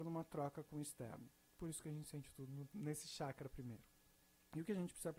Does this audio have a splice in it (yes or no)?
yes